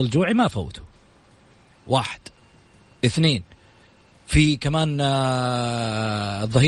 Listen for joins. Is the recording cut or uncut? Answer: uncut